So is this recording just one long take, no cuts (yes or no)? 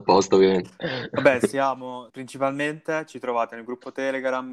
no